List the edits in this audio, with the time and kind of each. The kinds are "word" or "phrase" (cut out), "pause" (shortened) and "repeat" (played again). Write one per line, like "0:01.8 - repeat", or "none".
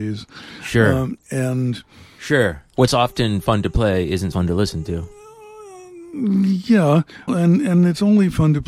0:02.9 - word
0:04.3 - word
0:07.3 - word

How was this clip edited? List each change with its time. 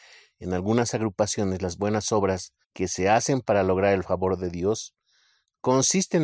0:02.6 - pause

